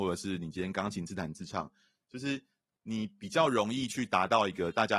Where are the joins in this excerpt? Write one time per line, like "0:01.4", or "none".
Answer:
none